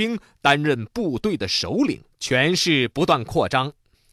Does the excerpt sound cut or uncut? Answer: cut